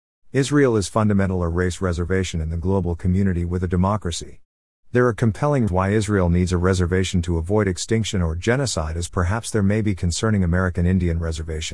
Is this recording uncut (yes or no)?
no